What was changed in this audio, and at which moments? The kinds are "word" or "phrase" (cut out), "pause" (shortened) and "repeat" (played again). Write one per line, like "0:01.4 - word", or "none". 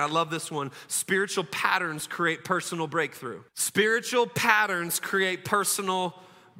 0:03.5 - pause